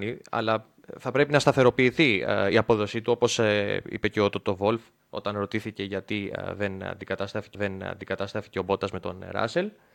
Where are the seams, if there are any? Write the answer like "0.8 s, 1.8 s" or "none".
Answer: 7.5 s